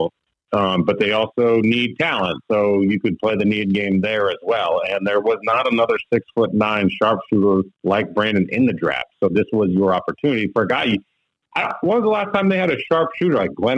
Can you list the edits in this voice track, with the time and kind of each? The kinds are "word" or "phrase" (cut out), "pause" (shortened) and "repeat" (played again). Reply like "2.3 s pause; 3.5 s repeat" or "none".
none